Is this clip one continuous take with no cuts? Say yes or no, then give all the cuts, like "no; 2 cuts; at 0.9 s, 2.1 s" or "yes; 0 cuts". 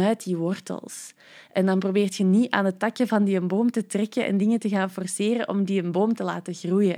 yes; 0 cuts